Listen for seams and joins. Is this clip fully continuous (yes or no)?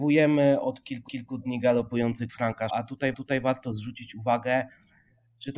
no